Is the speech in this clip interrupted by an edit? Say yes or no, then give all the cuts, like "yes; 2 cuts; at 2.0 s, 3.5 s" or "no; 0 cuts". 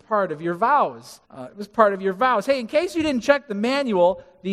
yes; 1 cut; at 1.2 s